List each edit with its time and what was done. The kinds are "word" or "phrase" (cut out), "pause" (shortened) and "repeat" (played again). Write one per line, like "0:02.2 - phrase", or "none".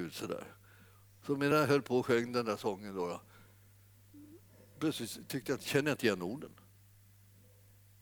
none